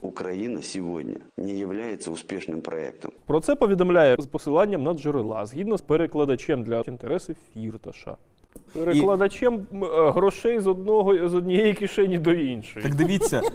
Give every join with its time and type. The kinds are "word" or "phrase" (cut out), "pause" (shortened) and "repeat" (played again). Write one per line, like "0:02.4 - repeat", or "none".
0:01.3 - pause
0:04.2 - word
0:05.8 - phrase
0:06.8 - phrase
0:08.7 - word